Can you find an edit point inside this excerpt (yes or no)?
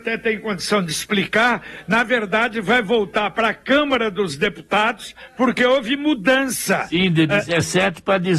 no